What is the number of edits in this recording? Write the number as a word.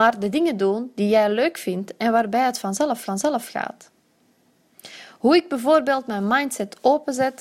one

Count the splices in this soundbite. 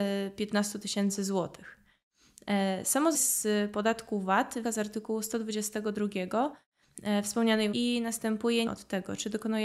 four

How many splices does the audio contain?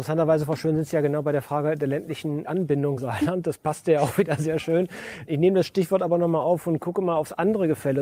one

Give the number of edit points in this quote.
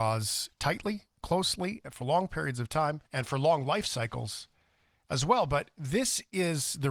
one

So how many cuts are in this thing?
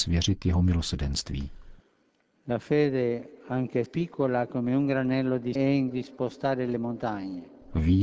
three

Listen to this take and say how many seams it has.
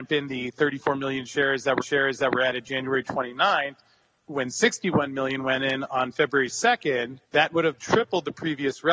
three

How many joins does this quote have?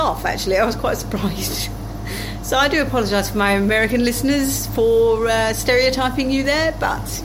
zero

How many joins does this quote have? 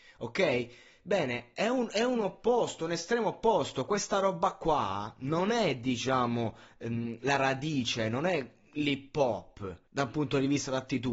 one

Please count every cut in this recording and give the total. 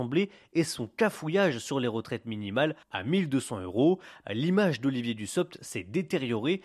one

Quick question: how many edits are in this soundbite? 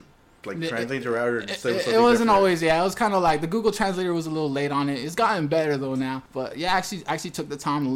one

